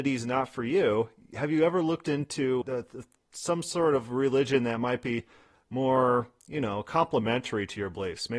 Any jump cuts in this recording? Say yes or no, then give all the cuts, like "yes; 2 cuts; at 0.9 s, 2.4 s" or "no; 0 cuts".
yes; 1 cut; at 2.6 s